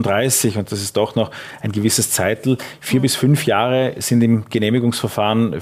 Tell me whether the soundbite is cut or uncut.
uncut